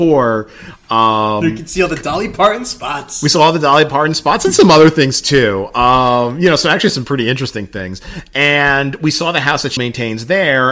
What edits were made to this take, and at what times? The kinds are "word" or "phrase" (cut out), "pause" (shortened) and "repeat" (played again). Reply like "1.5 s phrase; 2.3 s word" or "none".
9.8 s word